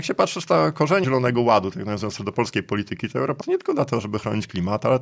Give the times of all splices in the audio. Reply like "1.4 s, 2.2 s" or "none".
1.0 s, 3.4 s